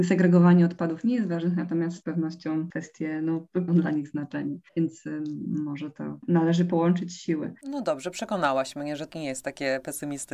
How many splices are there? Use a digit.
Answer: 5